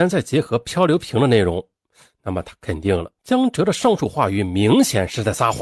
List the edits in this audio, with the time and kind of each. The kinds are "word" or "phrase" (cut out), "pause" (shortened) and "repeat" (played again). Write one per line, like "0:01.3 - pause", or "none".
0:03.2 - pause